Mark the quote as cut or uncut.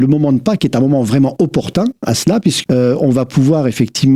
cut